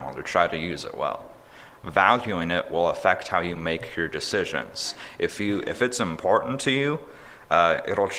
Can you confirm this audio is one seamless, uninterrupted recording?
yes; 0 cuts

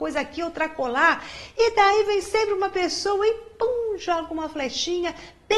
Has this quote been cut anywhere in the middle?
no; 0 cuts

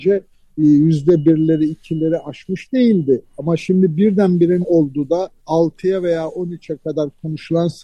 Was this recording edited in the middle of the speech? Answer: yes; 2 cuts; at 4.6 s, 5.4 s

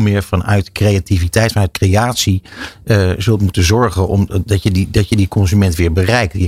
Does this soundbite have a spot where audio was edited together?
no; 0 cuts

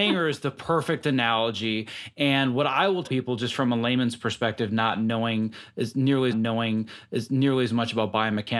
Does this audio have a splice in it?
yes; 2 cuts; at 3.0 s, 6.3 s

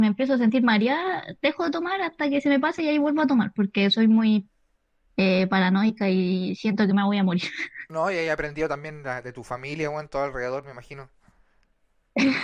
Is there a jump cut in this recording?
no; 0 cuts

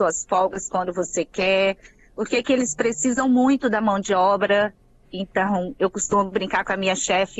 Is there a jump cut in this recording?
no; 0 cuts

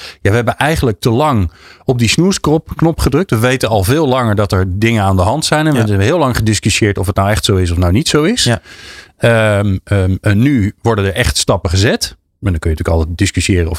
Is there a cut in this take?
no; 0 cuts

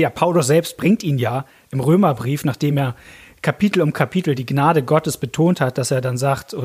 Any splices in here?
no; 0 cuts

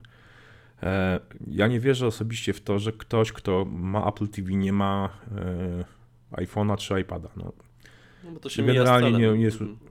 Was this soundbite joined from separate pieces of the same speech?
no; 0 cuts

